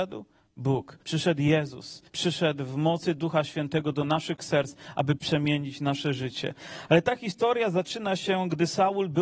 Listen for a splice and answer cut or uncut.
cut